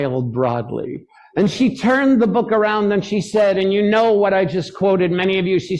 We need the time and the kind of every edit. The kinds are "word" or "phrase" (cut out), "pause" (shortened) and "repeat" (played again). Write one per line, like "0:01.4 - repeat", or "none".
0:01.1 - pause